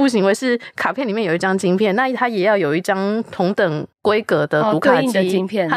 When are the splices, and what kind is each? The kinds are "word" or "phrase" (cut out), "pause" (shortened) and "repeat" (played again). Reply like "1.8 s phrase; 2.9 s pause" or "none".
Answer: 3.9 s pause